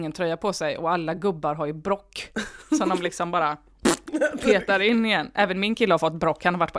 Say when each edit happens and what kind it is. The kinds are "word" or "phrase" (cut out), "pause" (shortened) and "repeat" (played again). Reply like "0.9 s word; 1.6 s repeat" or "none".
none